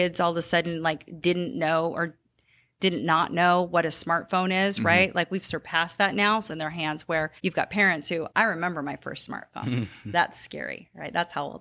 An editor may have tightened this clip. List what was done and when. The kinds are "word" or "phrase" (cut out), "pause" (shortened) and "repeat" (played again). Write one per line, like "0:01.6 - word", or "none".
0:06.5 - phrase
0:07.4 - pause
0:08.3 - word